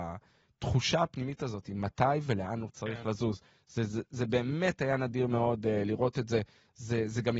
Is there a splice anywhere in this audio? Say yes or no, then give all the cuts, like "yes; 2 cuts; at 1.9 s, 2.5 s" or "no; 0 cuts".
no; 0 cuts